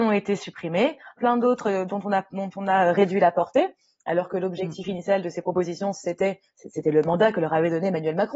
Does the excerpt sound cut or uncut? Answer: uncut